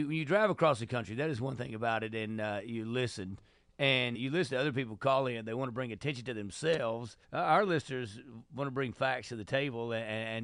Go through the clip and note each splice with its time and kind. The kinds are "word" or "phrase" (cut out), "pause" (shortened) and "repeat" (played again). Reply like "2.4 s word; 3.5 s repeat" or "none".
4.1 s word; 7.2 s pause